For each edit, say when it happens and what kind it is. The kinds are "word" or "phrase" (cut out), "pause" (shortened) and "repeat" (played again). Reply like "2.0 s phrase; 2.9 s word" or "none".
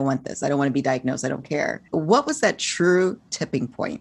1.9 s pause